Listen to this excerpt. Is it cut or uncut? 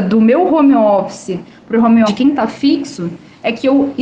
cut